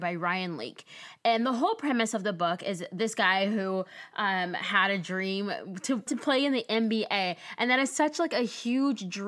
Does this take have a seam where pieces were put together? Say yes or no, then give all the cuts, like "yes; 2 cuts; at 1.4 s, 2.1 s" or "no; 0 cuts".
yes; 1 cut; at 6.1 s